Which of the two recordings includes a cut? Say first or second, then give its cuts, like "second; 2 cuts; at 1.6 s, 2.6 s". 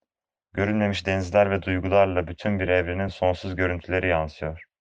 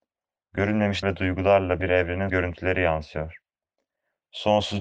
second; 3 cuts; at 1.0 s, 1.8 s, 2.3 s